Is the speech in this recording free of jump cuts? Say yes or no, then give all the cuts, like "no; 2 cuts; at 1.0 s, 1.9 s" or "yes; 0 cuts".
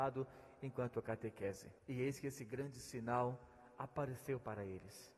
no; 1 cut; at 1.8 s